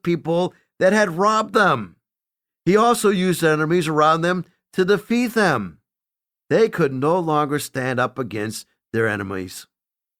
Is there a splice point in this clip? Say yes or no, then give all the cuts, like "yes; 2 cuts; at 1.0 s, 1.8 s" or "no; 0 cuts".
no; 0 cuts